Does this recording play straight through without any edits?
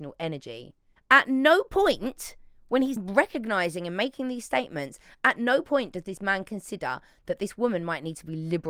no; 2 cuts; at 1.0 s, 3.0 s

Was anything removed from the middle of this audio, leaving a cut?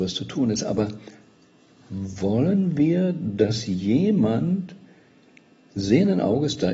no; 0 cuts

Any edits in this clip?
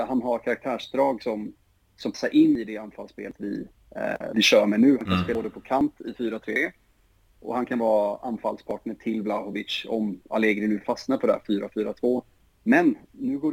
no; 0 cuts

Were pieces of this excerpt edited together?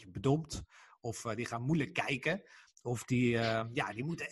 no; 0 cuts

